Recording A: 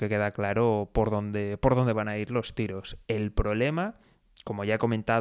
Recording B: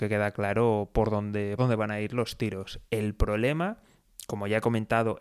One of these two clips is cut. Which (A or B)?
B